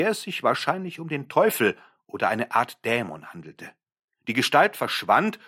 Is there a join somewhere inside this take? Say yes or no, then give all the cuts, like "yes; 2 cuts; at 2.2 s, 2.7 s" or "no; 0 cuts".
no; 0 cuts